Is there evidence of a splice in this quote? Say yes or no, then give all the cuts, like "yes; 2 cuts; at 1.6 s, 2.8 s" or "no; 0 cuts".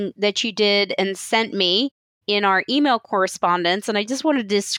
no; 0 cuts